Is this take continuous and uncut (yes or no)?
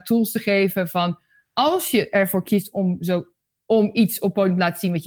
yes